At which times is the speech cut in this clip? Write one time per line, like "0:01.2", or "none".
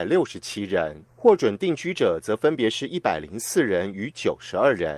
0:01.1